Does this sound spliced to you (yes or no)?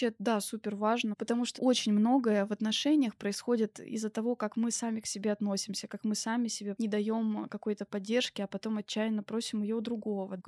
yes